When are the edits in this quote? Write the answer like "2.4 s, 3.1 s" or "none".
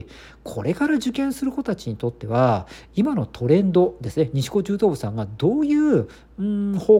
none

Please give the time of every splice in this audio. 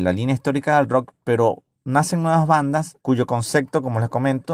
3.0 s

